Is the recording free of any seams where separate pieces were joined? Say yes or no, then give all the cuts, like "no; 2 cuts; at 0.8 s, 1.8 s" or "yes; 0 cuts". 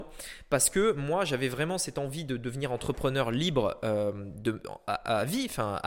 yes; 0 cuts